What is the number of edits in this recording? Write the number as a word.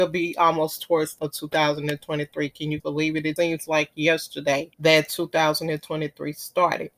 four